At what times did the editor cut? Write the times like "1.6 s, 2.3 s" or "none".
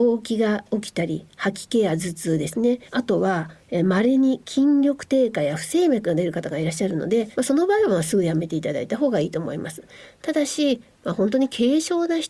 2.9 s, 7.3 s